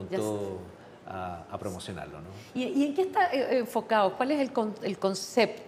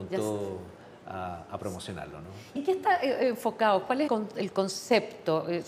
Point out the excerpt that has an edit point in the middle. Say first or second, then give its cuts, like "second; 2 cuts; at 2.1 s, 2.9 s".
second; 2 cuts; at 2.6 s, 4.1 s